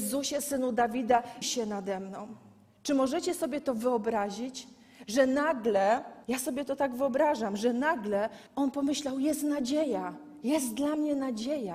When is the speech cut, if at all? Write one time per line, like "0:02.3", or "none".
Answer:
0:01.4
0:06.2
0:08.5